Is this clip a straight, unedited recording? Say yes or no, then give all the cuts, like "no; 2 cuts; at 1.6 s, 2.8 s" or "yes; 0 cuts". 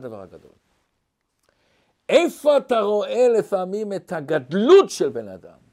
yes; 0 cuts